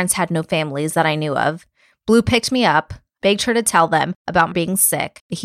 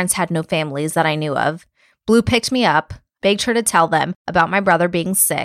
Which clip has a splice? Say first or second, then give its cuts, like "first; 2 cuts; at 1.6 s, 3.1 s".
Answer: first; 1 cut; at 4.5 s